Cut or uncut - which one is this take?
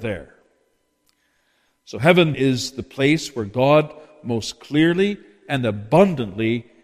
cut